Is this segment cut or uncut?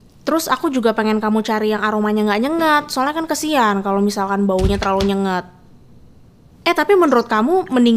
uncut